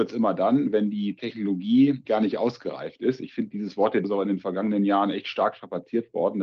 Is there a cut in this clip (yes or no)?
yes